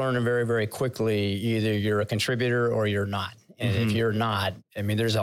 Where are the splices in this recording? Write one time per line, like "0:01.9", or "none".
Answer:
none